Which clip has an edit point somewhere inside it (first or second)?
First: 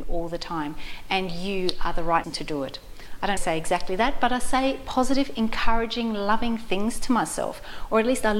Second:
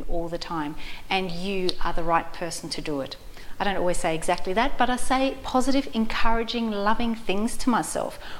first